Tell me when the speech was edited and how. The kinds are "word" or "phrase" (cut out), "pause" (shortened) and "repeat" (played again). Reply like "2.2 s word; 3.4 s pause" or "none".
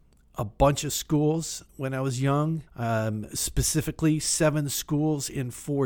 1.7 s pause; 2.7 s pause